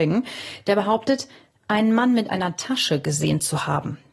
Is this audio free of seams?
yes; 0 cuts

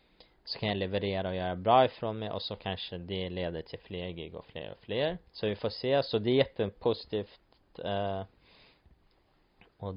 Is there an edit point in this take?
yes; 1 cut; at 5.3 s

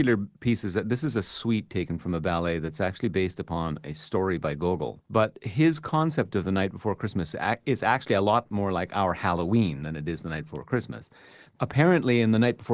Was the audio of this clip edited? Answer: yes; 1 cut; at 5.1 s

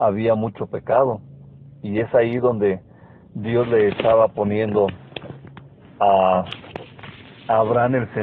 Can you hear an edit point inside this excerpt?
no; 0 cuts

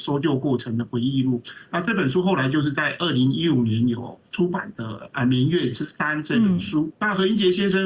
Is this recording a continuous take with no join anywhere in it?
no; 2 cuts; at 4.2 s, 7.0 s

